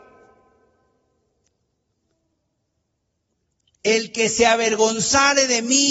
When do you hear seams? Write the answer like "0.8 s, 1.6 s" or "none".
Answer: none